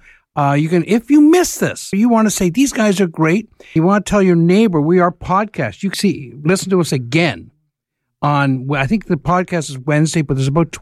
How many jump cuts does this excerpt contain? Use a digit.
3